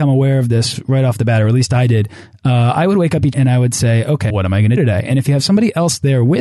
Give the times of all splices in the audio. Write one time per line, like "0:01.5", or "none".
0:03.3
0:04.3
0:04.8